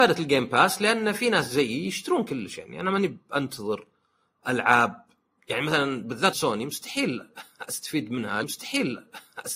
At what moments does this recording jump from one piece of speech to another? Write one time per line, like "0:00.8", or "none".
0:06.3
0:08.4